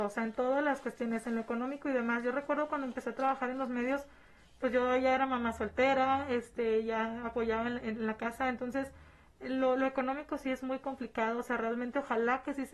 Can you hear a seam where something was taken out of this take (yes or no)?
no